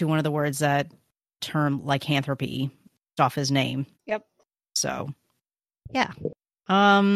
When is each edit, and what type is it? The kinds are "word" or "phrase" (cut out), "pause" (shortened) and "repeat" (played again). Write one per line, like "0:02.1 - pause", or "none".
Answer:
0:01.4 - word
0:03.2 - phrase
0:03.9 - pause